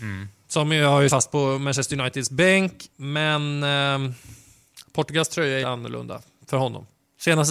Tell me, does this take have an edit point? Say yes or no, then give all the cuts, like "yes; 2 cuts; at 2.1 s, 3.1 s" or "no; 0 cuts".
yes; 3 cuts; at 1.1 s, 2.9 s, 5.6 s